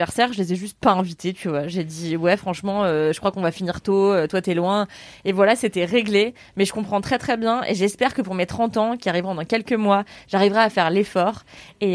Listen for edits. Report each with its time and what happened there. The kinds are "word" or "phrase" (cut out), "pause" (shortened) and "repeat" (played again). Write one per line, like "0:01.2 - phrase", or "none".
none